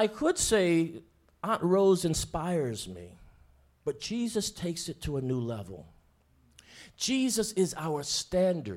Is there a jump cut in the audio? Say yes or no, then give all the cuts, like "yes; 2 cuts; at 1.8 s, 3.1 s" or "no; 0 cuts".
no; 0 cuts